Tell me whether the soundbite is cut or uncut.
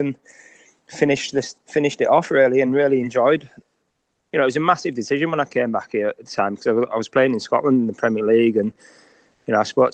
uncut